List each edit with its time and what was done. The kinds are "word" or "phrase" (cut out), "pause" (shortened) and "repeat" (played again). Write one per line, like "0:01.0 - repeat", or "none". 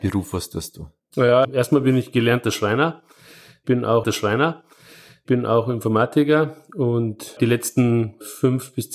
0:01.4 - word
0:04.0 - repeat
0:07.4 - word